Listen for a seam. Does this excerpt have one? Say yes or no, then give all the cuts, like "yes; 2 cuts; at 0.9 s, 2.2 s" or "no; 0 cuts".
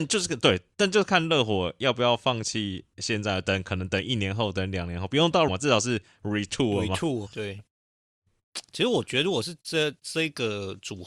yes; 2 cuts; at 5.5 s, 7.3 s